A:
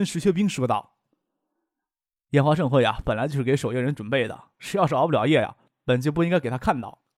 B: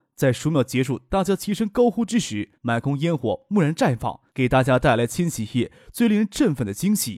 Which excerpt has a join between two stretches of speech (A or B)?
B